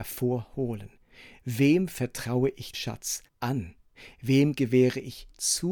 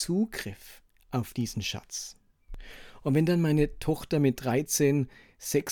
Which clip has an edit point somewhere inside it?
first; 2 cuts; at 2.7 s, 3.3 s

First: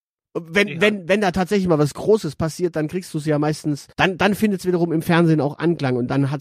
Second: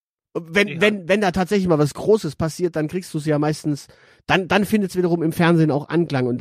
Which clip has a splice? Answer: first; 1 cut; at 3.9 s

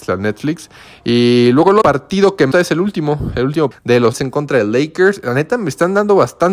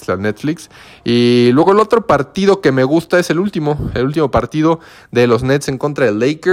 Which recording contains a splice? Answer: first; 4 cuts; at 1.8 s, 2.5 s, 3.7 s, 4.1 s

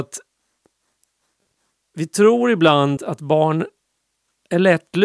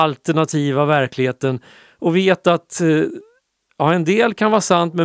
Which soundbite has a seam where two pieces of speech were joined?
first; 1 cut; at 3.0 s

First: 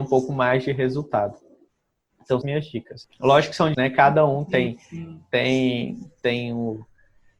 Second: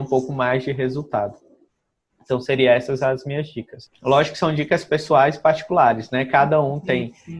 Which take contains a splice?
first; 2 cuts; at 2.4 s, 3.7 s

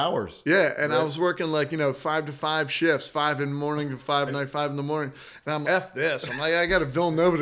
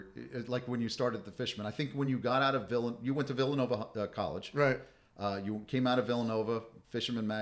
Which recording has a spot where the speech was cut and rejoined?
first; 2 cuts; at 4.3 s, 5.6 s

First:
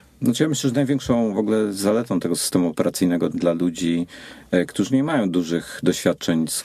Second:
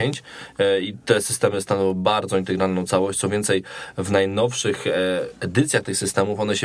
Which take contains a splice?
first; 1 cut; at 3.3 s

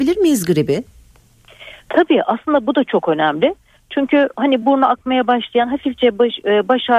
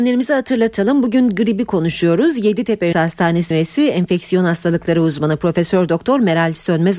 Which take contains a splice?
second; 2 cuts; at 2.9 s, 3.5 s

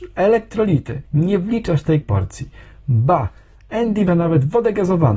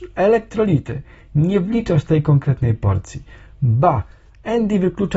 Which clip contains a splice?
first; 3 cuts; at 1.0 s, 2.0 s, 4.1 s

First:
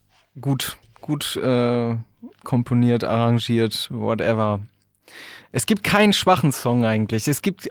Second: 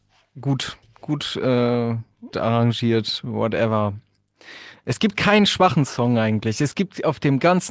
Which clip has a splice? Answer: second; 1 cut; at 2.3 s

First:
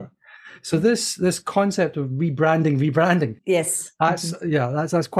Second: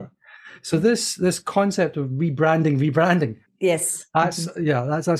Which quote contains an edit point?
first; 1 cut; at 3.4 s

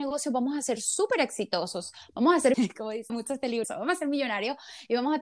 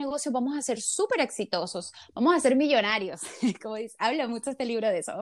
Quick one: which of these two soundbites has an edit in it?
first; 3 cuts; at 2.5 s, 3.1 s, 3.6 s

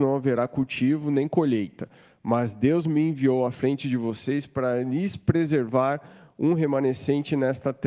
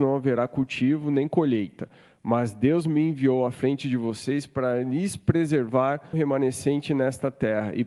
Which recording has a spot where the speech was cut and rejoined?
second; 1 cut; at 6.1 s

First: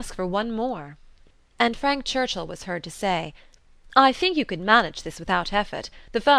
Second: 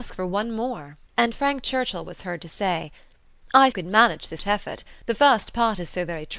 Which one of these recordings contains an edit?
second; 3 cuts; at 1.1 s, 3.7 s, 4.4 s

